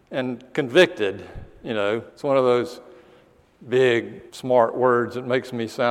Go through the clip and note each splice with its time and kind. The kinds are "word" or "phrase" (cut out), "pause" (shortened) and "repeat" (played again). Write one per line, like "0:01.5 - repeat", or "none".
0:02.1 - pause
0:04.3 - pause